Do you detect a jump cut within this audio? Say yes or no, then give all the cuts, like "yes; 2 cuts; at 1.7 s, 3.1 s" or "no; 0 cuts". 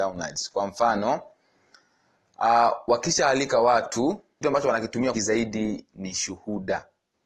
yes; 2 cuts; at 4.4 s, 5.1 s